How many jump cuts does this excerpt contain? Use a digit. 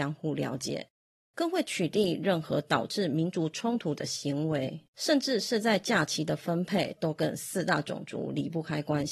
1